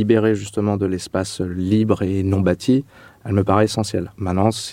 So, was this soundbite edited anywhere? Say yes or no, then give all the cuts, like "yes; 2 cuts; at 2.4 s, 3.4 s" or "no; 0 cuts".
no; 0 cuts